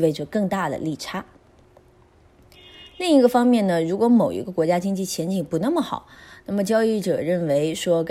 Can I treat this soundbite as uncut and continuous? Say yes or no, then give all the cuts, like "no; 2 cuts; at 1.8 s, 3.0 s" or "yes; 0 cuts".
yes; 0 cuts